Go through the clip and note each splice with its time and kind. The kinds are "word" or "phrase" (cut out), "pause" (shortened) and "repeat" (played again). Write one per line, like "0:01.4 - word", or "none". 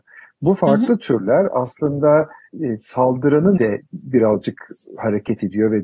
0:02.5 - word
0:03.6 - word
0:03.9 - pause

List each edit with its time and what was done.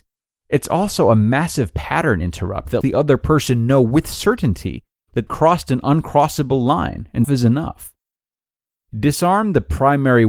0:02.8 - word
0:05.3 - word
0:07.2 - word

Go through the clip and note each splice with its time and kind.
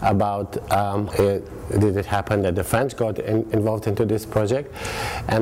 0:01.1 - word

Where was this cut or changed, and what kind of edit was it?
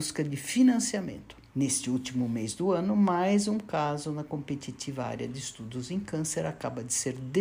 0:01.5 - pause

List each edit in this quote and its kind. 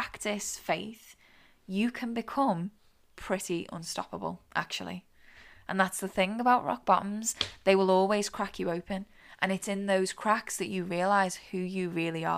0:04.5 - pause

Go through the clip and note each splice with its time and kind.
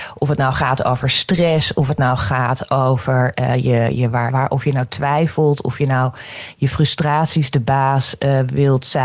0:04.3 - phrase

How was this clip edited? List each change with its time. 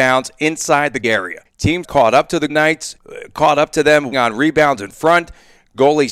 0:01.0 - word
0:01.8 - word
0:02.5 - word
0:04.1 - word

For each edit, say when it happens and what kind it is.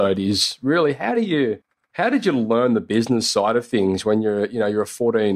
none

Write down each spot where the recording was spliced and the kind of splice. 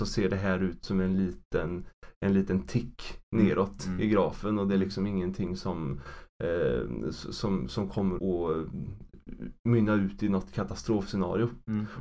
0:08.2 - word

